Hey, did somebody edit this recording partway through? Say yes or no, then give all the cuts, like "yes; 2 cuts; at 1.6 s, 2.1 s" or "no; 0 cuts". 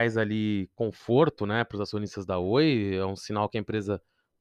no; 0 cuts